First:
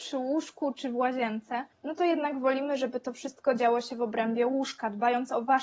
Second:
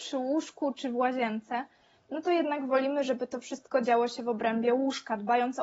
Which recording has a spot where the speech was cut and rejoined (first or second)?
first